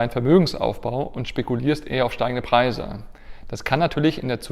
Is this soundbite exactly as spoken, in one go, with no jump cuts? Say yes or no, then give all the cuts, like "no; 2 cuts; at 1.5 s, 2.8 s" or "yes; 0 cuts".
yes; 0 cuts